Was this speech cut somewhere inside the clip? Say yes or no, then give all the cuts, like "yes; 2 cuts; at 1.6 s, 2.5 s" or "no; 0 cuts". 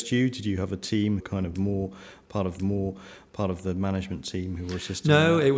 yes; 2 cuts; at 1.2 s, 2.6 s